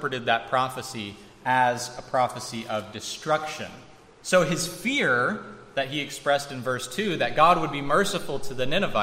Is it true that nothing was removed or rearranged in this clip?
yes; 0 cuts

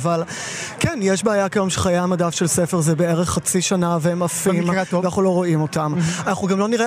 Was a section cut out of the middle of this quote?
no; 0 cuts

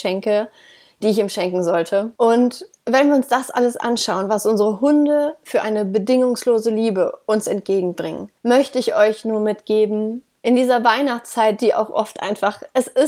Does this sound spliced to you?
yes; 2 cuts; at 2.2 s, 8.4 s

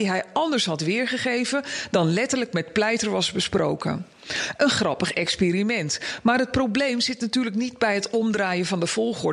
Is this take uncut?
yes; 0 cuts

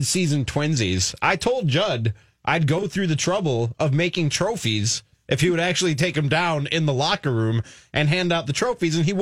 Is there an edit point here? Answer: no; 0 cuts

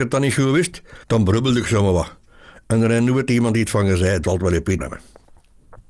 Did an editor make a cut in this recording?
yes; 3 cuts; at 1.0 s, 4.2 s, 4.8 s

